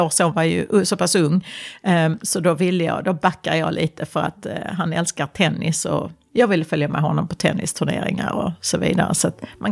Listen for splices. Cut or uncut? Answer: uncut